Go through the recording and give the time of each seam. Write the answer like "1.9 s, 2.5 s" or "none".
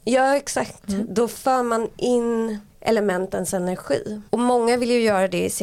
2.7 s, 4.3 s